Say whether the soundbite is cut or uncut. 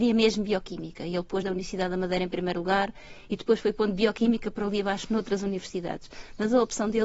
cut